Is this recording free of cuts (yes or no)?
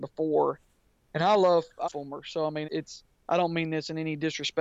no